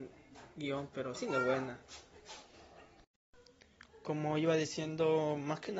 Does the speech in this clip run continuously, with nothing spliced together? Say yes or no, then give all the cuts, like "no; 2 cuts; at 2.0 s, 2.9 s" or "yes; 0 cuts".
no; 1 cut; at 1.1 s